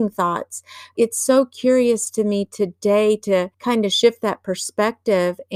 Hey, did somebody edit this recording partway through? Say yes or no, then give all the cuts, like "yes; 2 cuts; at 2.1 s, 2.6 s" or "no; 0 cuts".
yes; 2 cuts; at 0.9 s, 3.5 s